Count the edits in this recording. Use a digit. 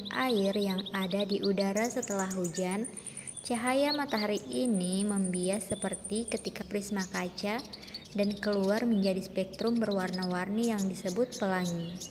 1